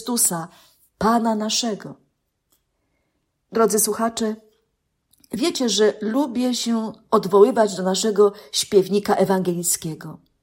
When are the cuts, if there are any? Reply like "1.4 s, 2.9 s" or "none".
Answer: none